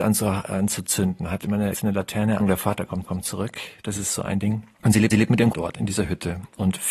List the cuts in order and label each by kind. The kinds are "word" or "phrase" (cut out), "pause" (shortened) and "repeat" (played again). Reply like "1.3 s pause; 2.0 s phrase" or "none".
1.7 s phrase; 2.4 s phrase; 3.0 s repeat; 4.7 s pause; 5.1 s repeat; 5.5 s word